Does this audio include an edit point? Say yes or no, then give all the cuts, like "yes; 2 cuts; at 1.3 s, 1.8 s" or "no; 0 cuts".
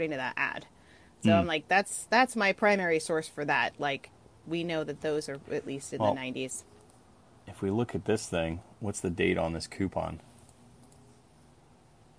no; 0 cuts